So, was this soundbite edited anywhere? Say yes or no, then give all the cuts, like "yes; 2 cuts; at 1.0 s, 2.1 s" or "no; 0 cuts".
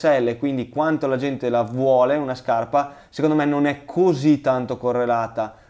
no; 0 cuts